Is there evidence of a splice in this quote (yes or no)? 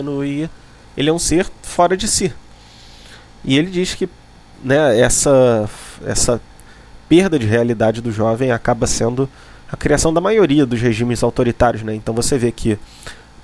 no